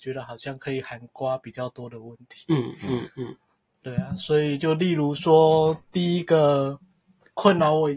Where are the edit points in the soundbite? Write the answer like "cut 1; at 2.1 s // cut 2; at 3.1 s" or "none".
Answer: none